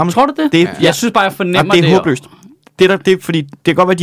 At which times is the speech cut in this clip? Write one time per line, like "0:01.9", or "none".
none